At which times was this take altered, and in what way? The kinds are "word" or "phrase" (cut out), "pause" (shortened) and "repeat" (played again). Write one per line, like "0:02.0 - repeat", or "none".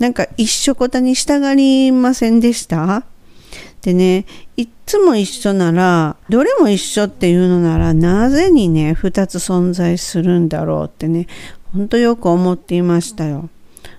0:06.3 - word